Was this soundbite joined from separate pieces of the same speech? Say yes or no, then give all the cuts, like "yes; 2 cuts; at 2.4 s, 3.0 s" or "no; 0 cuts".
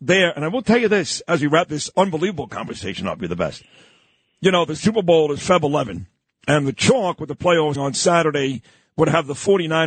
yes; 1 cut; at 7.7 s